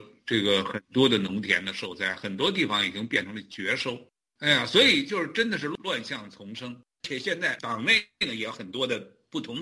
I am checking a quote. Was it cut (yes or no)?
no